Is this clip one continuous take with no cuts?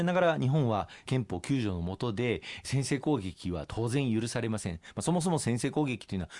yes; 0 cuts

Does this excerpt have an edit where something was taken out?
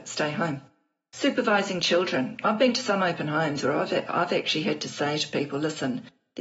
no; 0 cuts

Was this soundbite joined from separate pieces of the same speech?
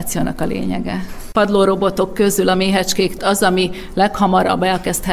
no; 0 cuts

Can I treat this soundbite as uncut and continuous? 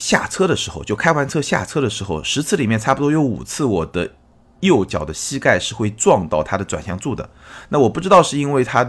yes; 0 cuts

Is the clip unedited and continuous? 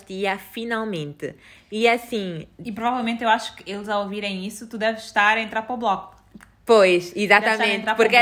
yes; 0 cuts

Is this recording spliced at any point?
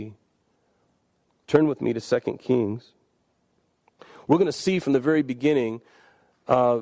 no; 0 cuts

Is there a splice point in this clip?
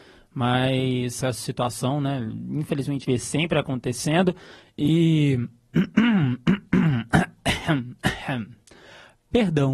yes; 2 cuts; at 1.2 s, 3.0 s

